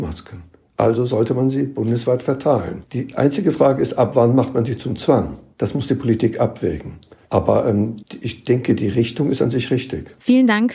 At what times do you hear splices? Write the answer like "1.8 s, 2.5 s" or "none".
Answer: none